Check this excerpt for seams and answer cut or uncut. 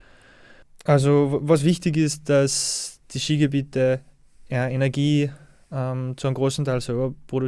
uncut